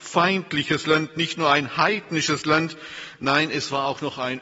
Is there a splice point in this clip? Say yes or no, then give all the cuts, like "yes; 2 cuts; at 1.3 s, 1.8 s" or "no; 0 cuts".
no; 0 cuts